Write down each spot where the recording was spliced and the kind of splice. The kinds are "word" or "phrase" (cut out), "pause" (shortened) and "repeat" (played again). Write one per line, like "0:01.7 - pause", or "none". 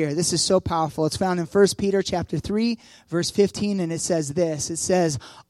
none

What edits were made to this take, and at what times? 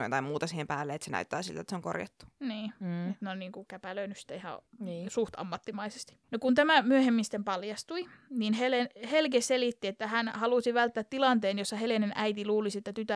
0:04.7 - pause
0:06.2 - pause

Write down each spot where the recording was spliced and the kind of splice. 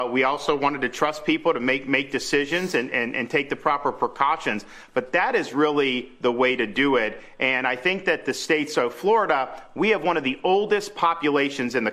none

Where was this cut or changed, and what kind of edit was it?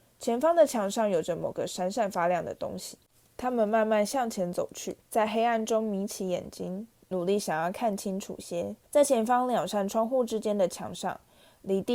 0:03.0 - pause
0:05.0 - pause
0:08.8 - pause

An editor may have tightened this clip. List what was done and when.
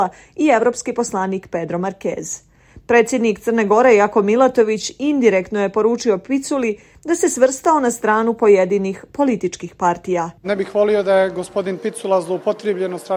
0:10.4 - pause

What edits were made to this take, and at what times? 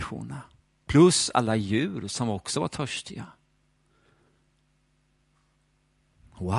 none

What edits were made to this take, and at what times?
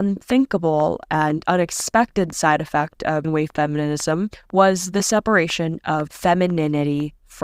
0:03.2 - word

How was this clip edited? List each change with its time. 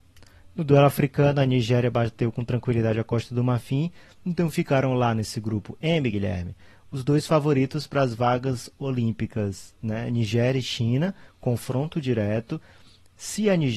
none

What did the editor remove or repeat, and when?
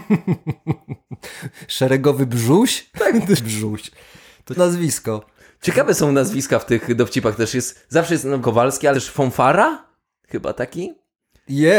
0:03.4 - word
0:04.6 - word
0:08.4 - word
0:08.9 - word

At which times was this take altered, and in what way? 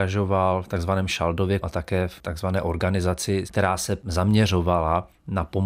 0:01.6 - word
0:03.5 - word

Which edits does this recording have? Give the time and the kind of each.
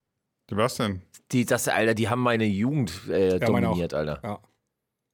none

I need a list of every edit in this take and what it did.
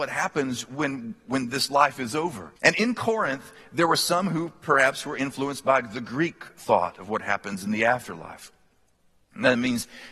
0:02.6 - pause

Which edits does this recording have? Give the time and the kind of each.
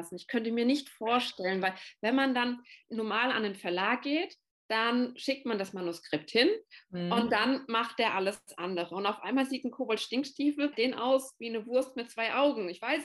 0:02.8 - pause
0:10.7 - word

